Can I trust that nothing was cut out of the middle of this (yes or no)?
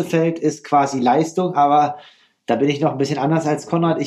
yes